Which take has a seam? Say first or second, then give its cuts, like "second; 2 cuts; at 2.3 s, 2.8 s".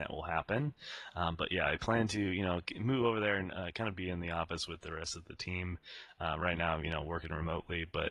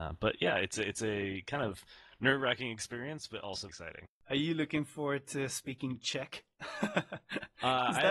second; 2 cuts; at 3.7 s, 4.1 s